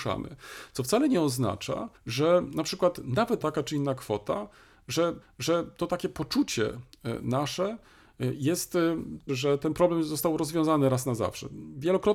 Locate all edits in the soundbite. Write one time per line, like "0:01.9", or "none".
0:02.0
0:03.4
0:05.2
0:09.3